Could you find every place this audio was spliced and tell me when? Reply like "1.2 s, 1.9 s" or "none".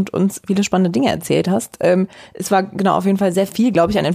none